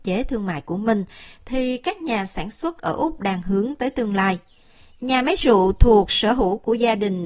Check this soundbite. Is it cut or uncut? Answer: uncut